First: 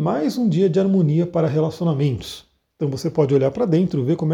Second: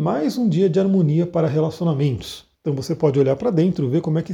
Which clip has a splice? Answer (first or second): second